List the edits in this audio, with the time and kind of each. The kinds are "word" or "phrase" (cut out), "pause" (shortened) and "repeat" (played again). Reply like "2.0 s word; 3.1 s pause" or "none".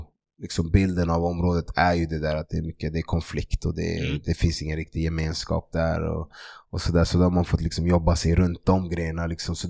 none